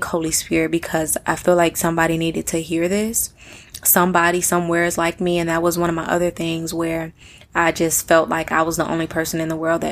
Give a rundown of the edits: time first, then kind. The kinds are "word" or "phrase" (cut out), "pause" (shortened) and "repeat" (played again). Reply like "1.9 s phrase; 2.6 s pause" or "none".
none